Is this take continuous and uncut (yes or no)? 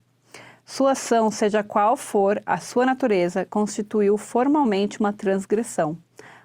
yes